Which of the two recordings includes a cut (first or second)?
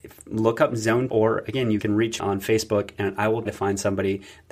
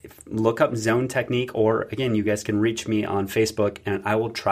first